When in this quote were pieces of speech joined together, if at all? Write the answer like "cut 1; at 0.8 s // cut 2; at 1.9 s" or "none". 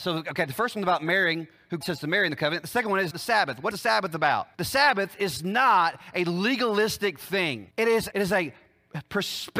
cut 1; at 1.8 s // cut 2; at 3.1 s // cut 3; at 3.7 s // cut 4; at 4.5 s // cut 5; at 7.7 s // cut 6; at 8.1 s